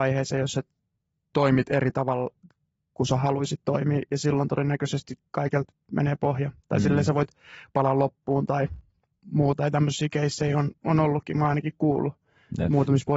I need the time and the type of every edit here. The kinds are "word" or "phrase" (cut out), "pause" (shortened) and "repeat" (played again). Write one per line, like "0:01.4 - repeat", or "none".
none